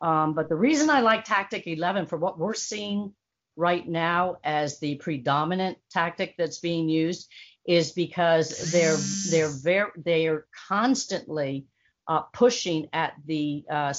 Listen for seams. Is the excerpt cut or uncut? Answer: uncut